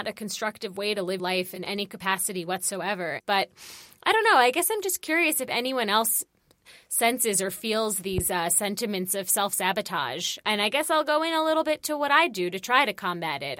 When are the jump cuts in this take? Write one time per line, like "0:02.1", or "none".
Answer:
0:01.2